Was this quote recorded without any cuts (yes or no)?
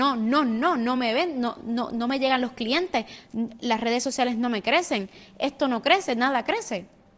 yes